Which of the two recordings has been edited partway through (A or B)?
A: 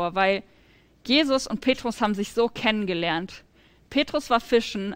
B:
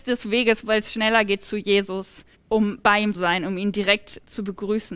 B